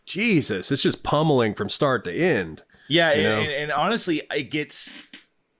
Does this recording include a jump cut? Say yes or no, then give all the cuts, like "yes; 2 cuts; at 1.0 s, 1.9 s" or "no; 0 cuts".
no; 0 cuts